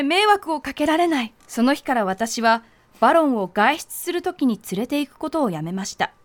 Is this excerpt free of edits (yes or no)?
no